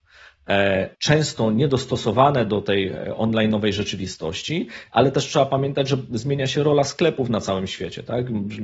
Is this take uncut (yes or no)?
no